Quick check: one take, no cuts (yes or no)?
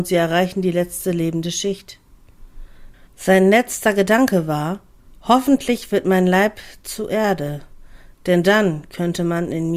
no